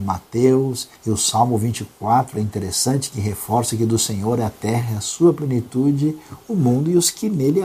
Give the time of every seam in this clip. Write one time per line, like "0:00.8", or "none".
0:01.0